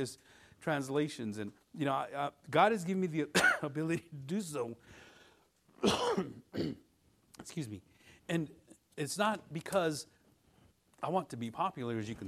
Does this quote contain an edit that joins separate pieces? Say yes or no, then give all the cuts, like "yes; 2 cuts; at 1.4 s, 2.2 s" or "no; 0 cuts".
yes; 1 cut; at 8.2 s